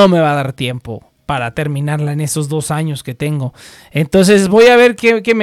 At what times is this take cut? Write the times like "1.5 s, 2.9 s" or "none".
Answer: none